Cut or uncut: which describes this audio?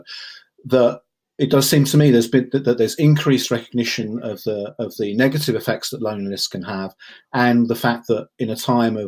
uncut